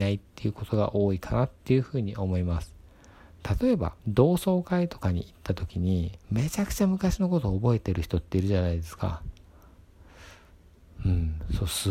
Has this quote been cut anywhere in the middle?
yes; 2 cuts; at 4.0 s, 6.2 s

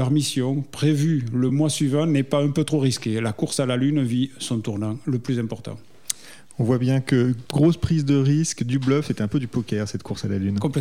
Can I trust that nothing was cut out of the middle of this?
yes; 0 cuts

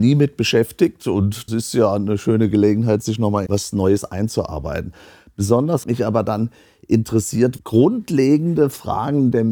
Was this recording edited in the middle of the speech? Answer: yes; 4 cuts; at 1.5 s, 3.5 s, 5.8 s, 7.6 s

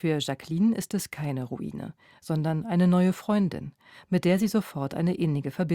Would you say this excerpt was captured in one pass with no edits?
yes; 0 cuts

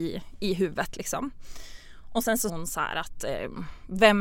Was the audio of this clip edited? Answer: yes; 1 cut; at 2.5 s

